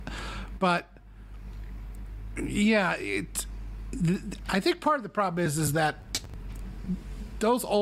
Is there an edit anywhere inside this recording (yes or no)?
no